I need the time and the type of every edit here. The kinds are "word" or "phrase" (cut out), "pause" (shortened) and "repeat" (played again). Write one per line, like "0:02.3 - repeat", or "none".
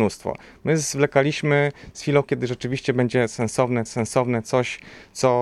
0:03.9 - repeat